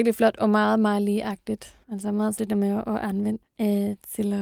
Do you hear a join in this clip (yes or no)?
yes